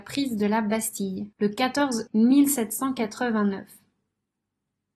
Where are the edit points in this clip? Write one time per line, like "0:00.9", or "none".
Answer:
0:01.3
0:02.1